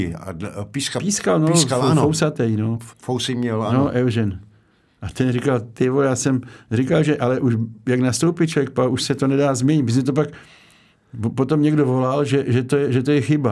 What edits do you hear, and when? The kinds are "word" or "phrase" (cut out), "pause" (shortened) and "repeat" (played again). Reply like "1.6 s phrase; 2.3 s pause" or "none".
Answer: 2.9 s pause